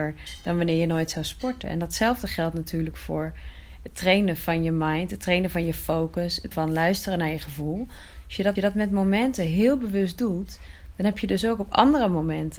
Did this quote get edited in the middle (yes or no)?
yes